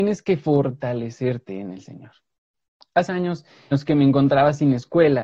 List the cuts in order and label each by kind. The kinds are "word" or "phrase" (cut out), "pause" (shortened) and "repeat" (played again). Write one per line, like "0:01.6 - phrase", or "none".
0:03.1 - word
0:03.7 - word